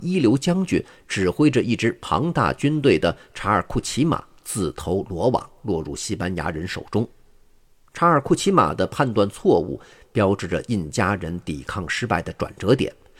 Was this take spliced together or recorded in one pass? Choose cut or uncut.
uncut